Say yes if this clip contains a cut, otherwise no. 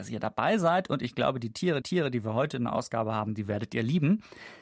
yes